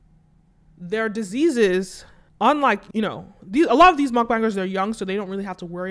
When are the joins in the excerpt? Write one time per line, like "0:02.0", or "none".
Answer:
0:02.3
0:02.9

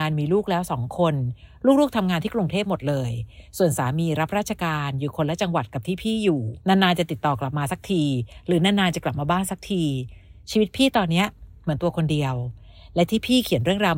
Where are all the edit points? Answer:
0:06.6

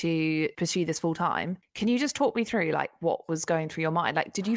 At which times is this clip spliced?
none

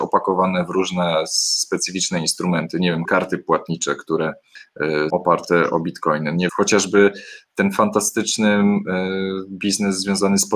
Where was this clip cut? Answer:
0:03.0
0:05.1
0:06.5

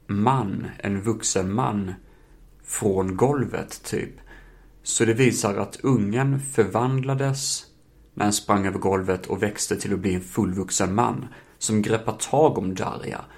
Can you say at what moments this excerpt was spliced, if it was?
none

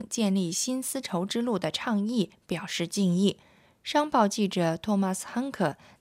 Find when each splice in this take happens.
0:03.4

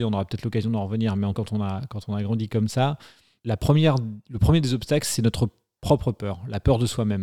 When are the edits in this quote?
0:01.3

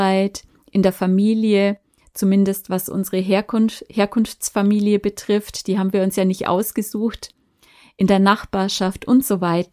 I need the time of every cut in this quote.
none

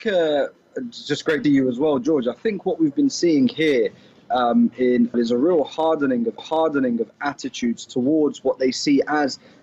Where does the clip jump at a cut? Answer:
0:01.4
0:05.1
0:06.4

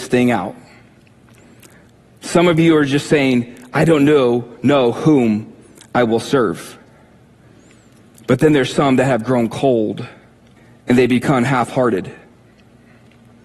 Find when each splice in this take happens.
0:10.6

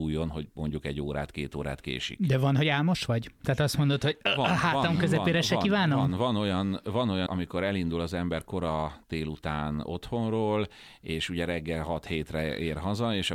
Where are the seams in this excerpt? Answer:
0:07.3

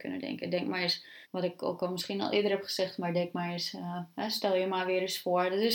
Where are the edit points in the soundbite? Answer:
0:01.2

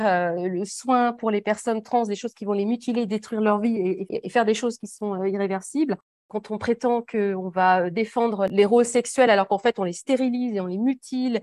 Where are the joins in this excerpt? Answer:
none

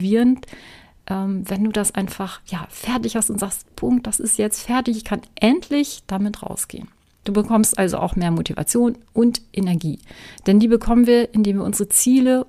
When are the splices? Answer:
none

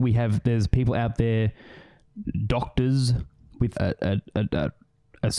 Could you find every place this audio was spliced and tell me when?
0:03.7

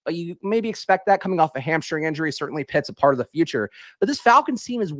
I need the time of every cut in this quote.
none

